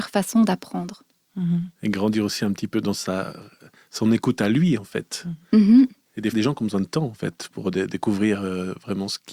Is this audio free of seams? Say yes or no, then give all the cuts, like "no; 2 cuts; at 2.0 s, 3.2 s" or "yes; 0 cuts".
no; 1 cut; at 6.3 s